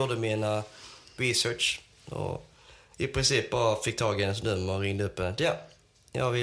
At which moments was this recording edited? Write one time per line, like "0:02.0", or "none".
none